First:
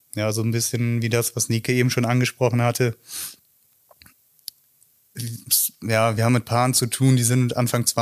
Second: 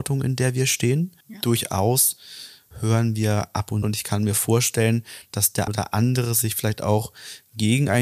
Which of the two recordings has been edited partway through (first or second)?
second